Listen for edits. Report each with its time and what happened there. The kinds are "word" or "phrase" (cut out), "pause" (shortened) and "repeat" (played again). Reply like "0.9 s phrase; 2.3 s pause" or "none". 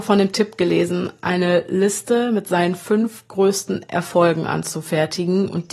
none